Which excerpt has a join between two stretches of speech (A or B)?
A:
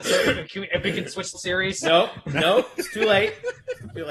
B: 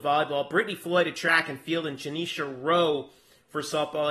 A